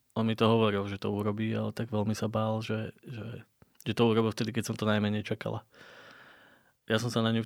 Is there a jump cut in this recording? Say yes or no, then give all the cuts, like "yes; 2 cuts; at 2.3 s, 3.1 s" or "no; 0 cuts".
no; 0 cuts